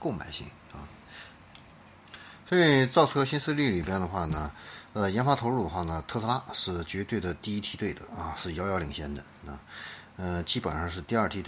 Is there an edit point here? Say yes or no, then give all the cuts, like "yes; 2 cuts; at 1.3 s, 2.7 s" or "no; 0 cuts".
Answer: no; 0 cuts